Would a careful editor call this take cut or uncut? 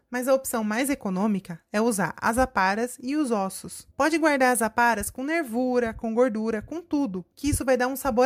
uncut